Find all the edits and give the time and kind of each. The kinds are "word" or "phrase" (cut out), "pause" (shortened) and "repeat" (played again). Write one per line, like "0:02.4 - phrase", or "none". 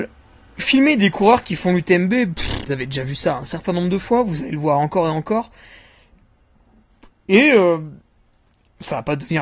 0:02.7 - word